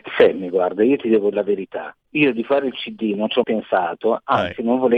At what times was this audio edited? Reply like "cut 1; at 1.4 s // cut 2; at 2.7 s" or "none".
cut 1; at 1.3 s // cut 2; at 2.0 s // cut 3; at 3.4 s

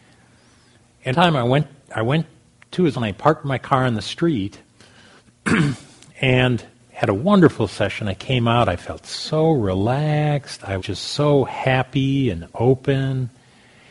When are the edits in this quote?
cut 1; at 1.1 s // cut 2; at 2.9 s // cut 3; at 10.8 s

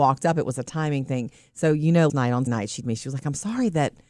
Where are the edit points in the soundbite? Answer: cut 1; at 2.1 s // cut 2; at 2.5 s // cut 3; at 2.8 s

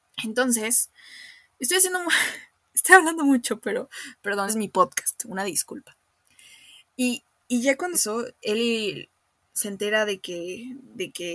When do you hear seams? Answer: cut 1; at 4.5 s // cut 2; at 7.9 s

